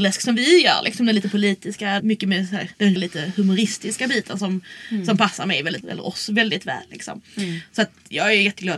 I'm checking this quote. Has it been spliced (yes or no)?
yes